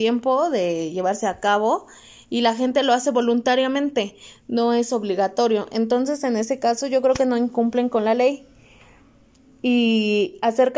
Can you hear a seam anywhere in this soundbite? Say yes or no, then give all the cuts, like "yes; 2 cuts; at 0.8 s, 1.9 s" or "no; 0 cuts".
no; 0 cuts